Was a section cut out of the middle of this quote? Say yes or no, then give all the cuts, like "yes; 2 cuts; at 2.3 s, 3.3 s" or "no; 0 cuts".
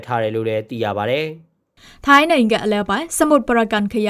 no; 0 cuts